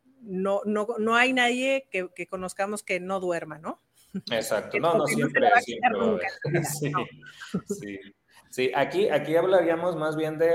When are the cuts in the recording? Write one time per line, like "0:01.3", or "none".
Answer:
none